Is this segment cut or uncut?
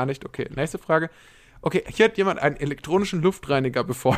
uncut